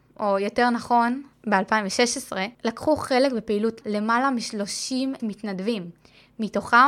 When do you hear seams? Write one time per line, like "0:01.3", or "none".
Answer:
0:02.5
0:03.8
0:05.2